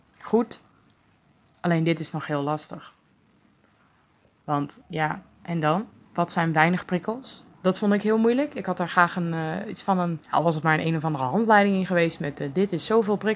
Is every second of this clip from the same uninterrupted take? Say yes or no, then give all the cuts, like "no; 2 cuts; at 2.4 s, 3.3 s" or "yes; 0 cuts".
no; 4 cuts; at 4.8 s, 5.9 s, 7.5 s, 10.2 s